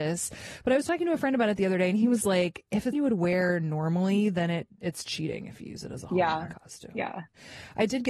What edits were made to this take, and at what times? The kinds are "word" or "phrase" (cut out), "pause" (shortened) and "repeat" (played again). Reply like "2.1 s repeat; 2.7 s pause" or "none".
2.9 s word; 5.0 s word